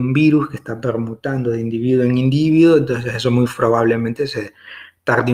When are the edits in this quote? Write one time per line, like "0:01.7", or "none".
none